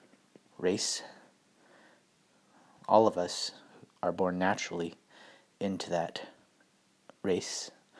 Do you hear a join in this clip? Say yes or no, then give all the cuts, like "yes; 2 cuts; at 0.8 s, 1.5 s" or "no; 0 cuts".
no; 0 cuts